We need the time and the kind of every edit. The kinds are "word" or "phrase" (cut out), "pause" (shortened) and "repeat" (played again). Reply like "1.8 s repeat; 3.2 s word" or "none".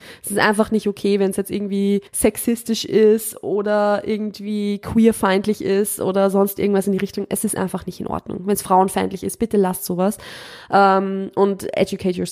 2.1 s pause